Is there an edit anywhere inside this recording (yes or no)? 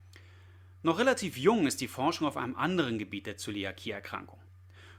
no